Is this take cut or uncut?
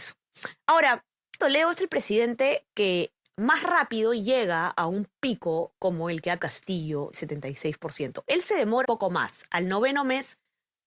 cut